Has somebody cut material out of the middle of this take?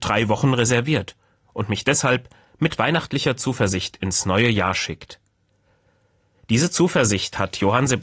no; 0 cuts

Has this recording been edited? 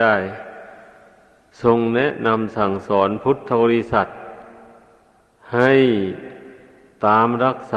no; 0 cuts

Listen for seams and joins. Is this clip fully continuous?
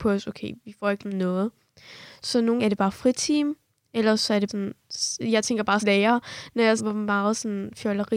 no; 5 cuts; at 1.0 s, 2.6 s, 4.5 s, 5.8 s, 6.8 s

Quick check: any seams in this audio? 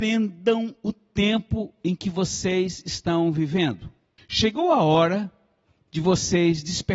yes; 1 cut; at 4.2 s

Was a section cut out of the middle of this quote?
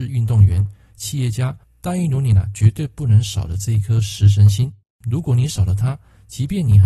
yes; 2 cuts; at 1.6 s, 4.8 s

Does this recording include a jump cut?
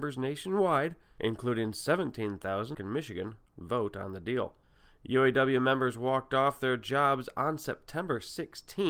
yes; 1 cut; at 2.7 s

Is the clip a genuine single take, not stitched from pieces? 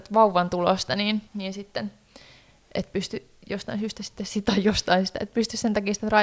no; 1 cut; at 1.3 s

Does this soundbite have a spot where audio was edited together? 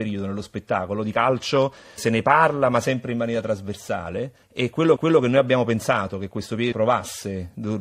yes; 4 cuts; at 2.0 s, 4.4 s, 5.0 s, 6.7 s

